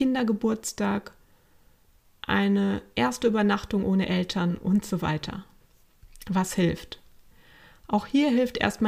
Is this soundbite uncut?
yes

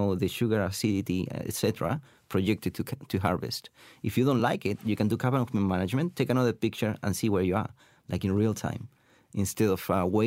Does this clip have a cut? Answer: no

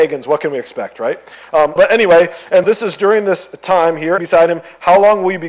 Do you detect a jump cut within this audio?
yes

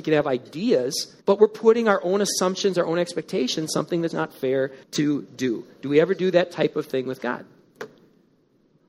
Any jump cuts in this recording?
yes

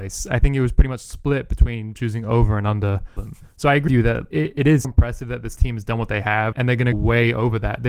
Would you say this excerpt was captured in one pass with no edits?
no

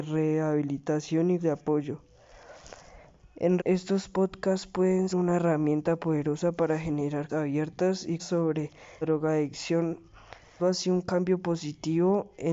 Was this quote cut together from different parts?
yes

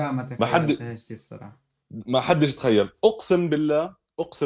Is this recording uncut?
yes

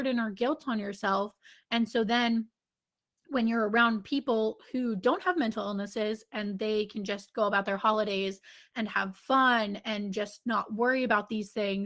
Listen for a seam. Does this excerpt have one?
no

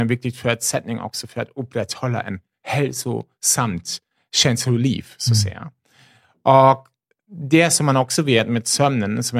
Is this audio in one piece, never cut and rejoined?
yes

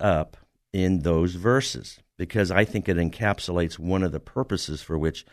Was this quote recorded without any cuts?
yes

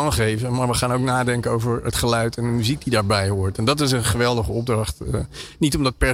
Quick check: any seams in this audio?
no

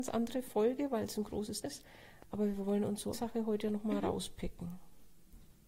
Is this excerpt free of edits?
no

